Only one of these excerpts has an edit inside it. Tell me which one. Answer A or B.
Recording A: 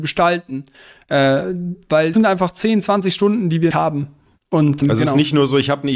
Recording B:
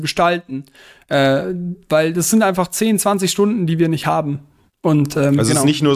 A